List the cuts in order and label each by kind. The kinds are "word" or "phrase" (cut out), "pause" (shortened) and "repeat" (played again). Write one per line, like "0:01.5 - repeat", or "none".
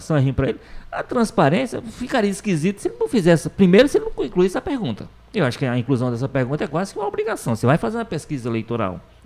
0:05.1 - pause